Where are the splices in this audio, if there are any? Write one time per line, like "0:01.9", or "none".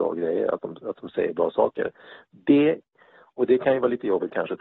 none

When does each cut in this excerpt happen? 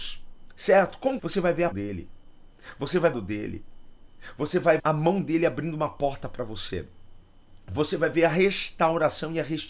0:01.2
0:01.7
0:03.1
0:04.8

